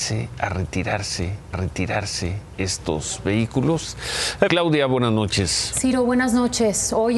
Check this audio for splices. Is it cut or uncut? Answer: cut